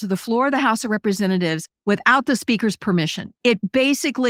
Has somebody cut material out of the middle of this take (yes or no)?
yes